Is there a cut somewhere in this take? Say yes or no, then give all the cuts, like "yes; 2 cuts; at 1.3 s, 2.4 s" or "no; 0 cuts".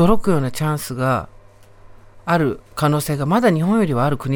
yes; 1 cut; at 2.7 s